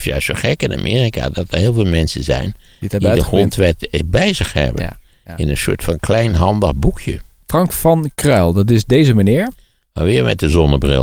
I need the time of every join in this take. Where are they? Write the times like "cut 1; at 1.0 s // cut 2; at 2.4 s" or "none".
none